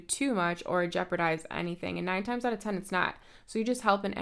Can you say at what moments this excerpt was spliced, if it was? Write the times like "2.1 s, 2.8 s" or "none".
none